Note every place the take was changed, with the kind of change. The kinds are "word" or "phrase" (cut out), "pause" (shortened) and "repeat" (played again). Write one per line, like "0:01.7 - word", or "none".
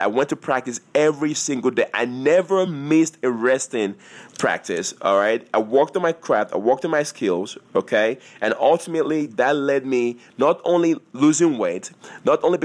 none